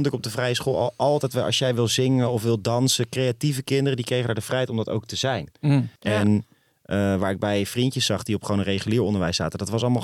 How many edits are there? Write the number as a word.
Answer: one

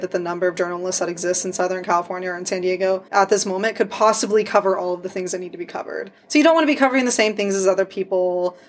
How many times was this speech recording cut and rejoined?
two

